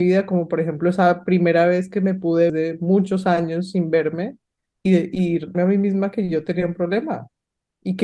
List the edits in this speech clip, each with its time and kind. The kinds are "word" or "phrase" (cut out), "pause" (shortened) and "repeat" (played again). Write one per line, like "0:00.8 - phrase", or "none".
0:02.5 - phrase
0:04.9 - word
0:05.5 - word